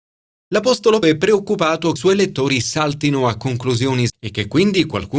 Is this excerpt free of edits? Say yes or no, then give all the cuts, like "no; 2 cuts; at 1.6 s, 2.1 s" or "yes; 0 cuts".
no; 3 cuts; at 1.0 s, 2.0 s, 4.1 s